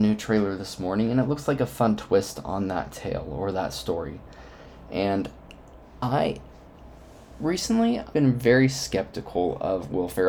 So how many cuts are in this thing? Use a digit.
1